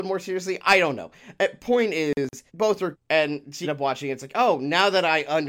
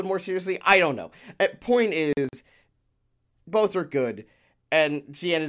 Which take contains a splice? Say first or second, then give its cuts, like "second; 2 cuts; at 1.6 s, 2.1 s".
first; 3 cuts; at 2.5 s, 2.9 s, 3.6 s